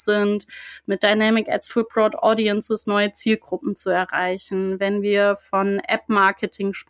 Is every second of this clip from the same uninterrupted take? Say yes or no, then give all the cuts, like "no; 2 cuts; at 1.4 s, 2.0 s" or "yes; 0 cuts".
yes; 0 cuts